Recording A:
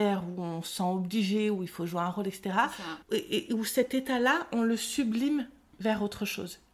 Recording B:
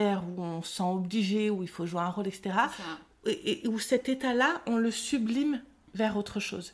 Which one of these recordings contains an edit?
A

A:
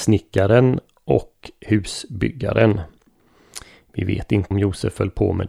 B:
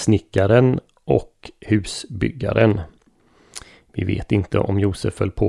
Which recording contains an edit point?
A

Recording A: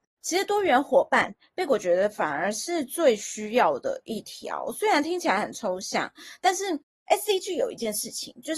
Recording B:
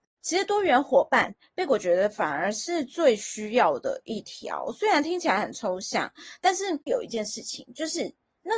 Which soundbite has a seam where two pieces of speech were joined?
B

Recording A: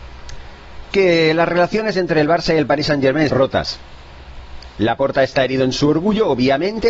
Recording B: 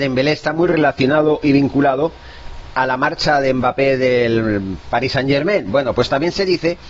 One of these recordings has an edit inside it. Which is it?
A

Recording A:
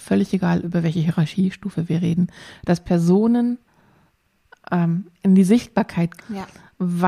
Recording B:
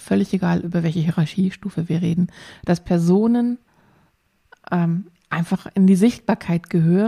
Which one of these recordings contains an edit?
A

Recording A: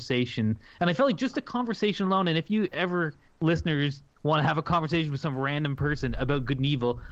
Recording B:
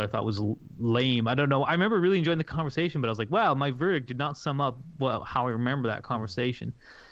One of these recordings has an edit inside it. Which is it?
A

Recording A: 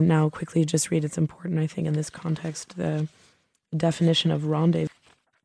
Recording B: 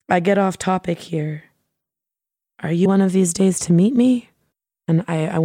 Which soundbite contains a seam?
B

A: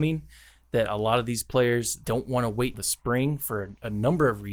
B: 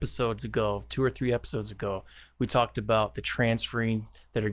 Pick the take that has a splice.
A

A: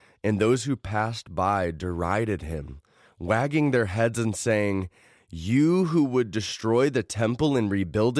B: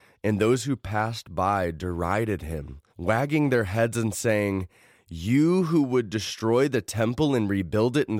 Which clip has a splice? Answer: B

